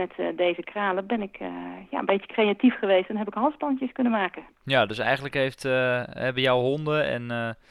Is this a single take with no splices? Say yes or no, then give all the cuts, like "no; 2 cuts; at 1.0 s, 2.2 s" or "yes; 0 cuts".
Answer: yes; 0 cuts